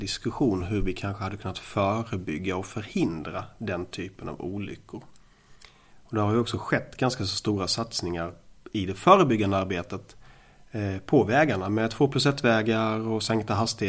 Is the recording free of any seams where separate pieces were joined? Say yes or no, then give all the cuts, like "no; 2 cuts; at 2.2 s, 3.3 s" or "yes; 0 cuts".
yes; 0 cuts